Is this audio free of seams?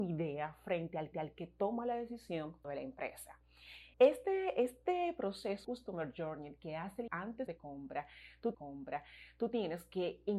no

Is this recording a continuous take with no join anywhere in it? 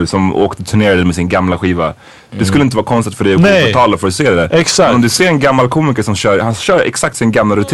yes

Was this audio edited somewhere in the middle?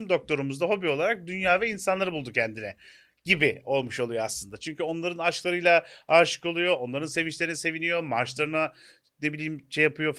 no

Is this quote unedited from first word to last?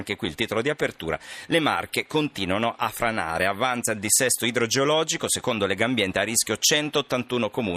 yes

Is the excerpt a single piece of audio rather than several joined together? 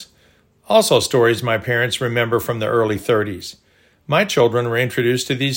yes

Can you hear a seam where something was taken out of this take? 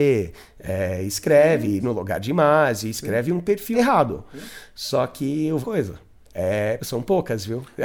yes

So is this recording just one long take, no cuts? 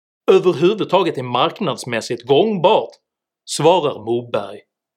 yes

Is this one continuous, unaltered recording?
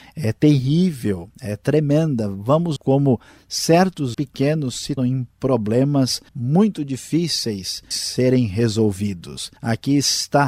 no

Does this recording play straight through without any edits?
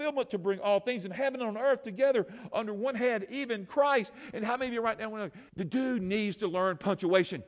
no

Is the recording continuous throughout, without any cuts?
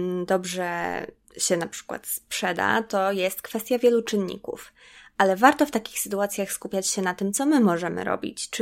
yes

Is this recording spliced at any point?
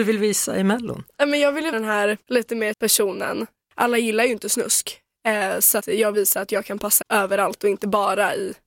yes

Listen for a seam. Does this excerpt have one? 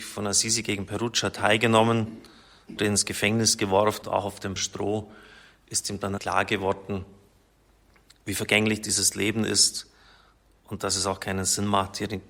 yes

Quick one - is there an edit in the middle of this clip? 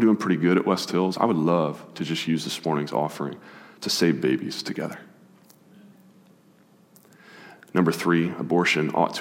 no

